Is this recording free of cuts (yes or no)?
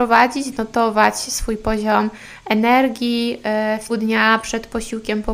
no